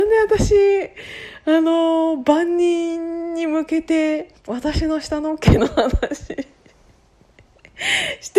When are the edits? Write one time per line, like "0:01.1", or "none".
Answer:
0:04.4

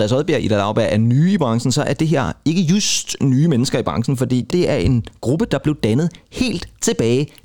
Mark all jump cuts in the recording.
0:04.5

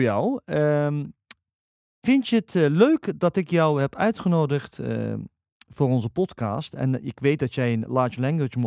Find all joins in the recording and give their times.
none

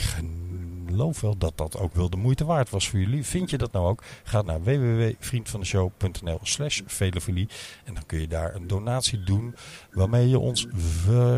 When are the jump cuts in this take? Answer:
0:01.9
0:04.4

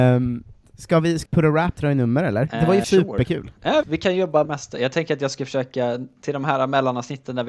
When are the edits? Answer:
0:01.3
0:01.8
0:02.8
0:03.8
0:04.4

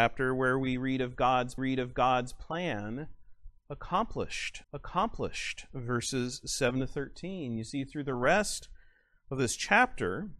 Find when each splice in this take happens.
0:01.6
0:04.6

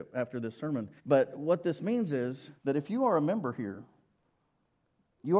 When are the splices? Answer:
0:01.0
0:02.6

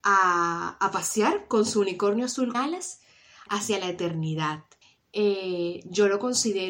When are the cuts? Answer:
0:02.5
0:03.5
0:04.8

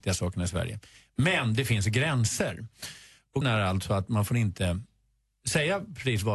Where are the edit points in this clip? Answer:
0:03.4

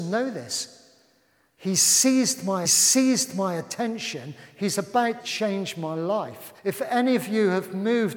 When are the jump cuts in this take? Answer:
0:02.7
0:05.2
0:06.6

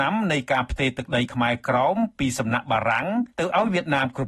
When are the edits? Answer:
0:03.3

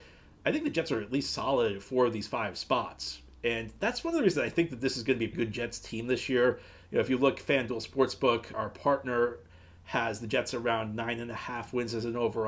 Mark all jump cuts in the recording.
0:05.3
0:08.5

